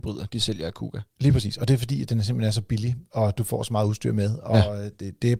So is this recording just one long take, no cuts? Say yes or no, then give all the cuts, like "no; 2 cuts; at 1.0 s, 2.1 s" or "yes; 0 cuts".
no; 1 cut; at 1.1 s